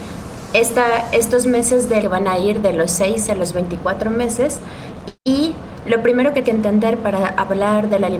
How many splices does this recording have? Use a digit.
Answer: 3